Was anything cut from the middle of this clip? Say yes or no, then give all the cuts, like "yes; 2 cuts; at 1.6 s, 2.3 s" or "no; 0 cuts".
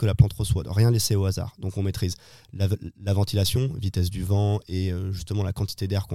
no; 0 cuts